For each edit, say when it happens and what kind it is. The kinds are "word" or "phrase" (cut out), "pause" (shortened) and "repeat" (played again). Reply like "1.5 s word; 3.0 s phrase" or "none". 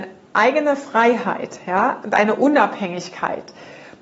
none